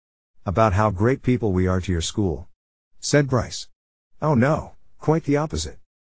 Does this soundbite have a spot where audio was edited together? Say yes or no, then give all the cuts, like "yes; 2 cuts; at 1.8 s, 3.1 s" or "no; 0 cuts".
no; 0 cuts